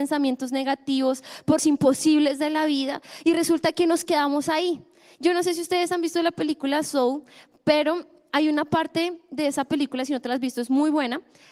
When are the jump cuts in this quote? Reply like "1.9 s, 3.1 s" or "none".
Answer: 1.6 s